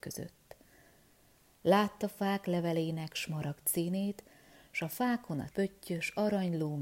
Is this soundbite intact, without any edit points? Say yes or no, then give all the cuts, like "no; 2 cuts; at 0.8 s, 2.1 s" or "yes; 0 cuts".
no; 1 cut; at 5.5 s